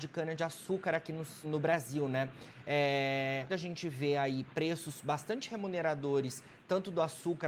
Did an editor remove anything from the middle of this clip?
yes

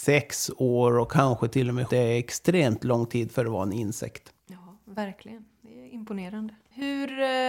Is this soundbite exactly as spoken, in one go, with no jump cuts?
no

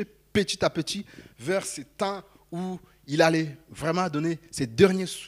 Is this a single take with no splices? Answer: yes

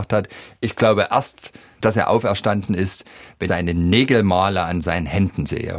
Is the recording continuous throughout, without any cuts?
no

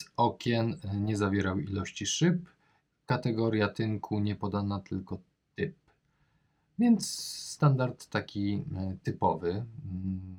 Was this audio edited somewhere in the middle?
no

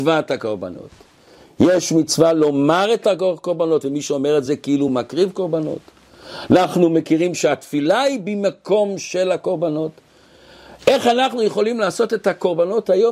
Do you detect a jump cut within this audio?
no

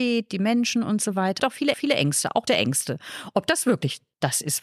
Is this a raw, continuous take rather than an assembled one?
no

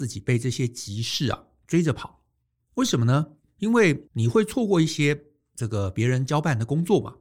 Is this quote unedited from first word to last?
yes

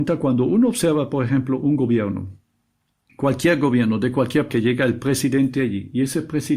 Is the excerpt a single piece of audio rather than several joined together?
no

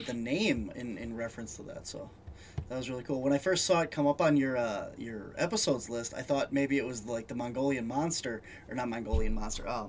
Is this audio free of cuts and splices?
yes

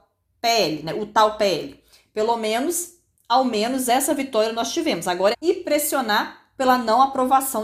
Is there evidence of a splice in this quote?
yes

